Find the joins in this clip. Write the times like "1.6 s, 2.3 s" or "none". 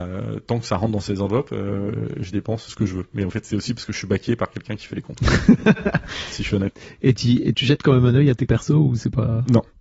2.7 s, 7.5 s, 8.5 s